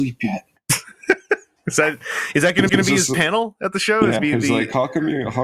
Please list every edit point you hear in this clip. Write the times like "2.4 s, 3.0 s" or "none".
2.7 s, 4.2 s